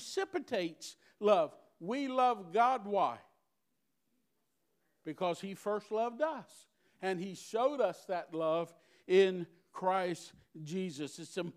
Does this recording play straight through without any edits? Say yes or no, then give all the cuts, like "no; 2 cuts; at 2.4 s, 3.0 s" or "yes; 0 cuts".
yes; 0 cuts